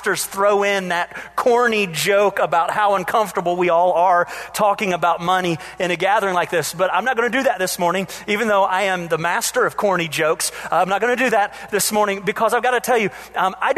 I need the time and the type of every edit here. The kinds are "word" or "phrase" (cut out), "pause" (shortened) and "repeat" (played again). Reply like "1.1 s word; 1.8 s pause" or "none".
none

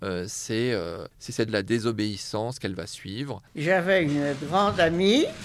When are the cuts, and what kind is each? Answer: 1.1 s pause; 1.5 s word; 3.5 s pause

